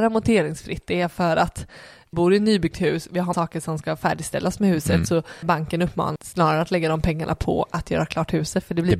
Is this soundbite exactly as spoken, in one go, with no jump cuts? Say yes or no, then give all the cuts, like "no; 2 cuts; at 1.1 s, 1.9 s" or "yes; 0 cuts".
no; 4 cuts; at 2.1 s, 3.3 s, 5.4 s, 6.2 s